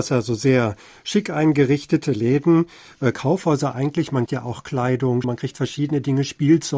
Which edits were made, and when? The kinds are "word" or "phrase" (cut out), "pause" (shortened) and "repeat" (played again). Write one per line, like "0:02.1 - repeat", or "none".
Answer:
0:03.1 - word
0:04.3 - word
0:05.2 - word

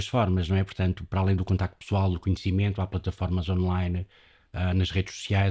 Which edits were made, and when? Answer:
none

